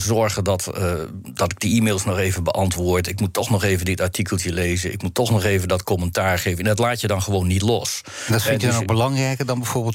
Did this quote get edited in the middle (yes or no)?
no